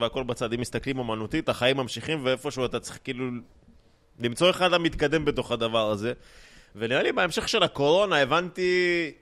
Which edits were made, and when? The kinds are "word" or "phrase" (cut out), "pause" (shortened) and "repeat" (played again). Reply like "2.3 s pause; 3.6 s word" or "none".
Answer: none